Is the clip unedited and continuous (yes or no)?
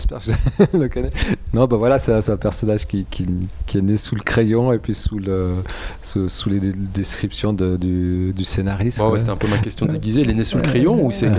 yes